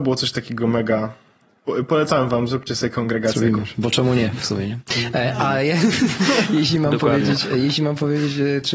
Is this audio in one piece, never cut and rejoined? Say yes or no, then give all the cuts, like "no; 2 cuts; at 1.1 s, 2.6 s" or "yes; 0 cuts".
yes; 0 cuts